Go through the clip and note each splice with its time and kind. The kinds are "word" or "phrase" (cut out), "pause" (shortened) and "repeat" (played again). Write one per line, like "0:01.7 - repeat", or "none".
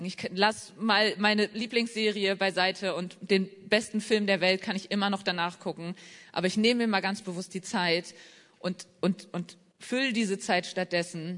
none